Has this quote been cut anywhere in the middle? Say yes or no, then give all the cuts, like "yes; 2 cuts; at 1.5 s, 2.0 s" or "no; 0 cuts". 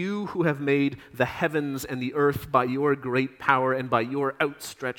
no; 0 cuts